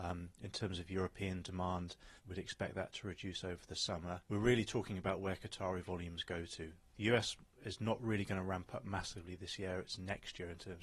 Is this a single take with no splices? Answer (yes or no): no